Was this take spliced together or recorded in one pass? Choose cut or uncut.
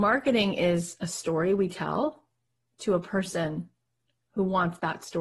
uncut